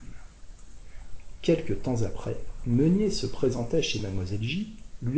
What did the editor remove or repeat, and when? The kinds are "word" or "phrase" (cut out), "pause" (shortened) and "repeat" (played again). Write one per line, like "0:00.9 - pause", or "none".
none